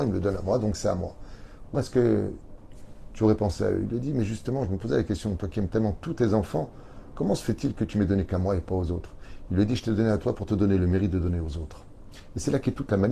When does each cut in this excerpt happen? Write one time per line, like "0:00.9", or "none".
0:01.7